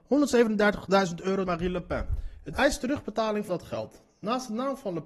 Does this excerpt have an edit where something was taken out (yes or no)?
yes